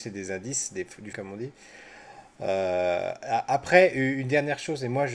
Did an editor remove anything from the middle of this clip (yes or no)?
yes